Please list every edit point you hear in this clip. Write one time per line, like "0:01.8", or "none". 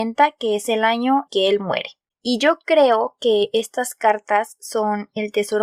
0:01.3
0:02.1